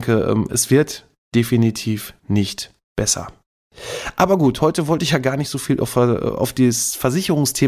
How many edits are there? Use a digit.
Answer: 1